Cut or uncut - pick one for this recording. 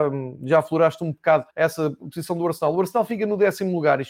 cut